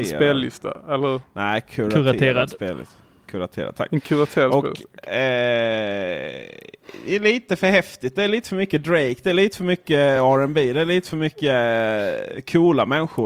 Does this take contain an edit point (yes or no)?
no